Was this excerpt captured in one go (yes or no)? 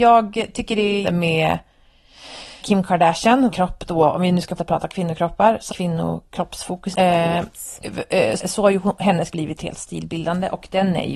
no